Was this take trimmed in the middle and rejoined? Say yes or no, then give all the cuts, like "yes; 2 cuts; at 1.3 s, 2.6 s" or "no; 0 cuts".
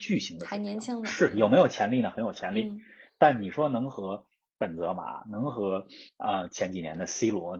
no; 0 cuts